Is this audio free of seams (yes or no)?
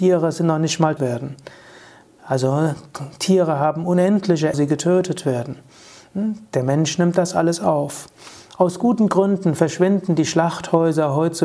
no